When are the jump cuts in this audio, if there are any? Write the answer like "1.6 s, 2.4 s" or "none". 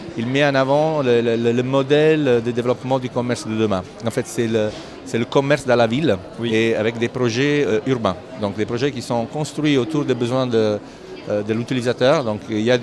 none